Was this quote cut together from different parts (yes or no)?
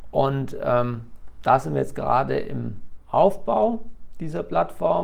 no